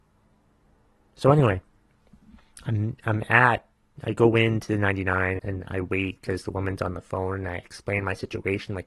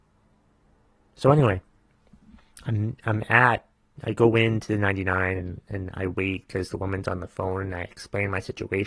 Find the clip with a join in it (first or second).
first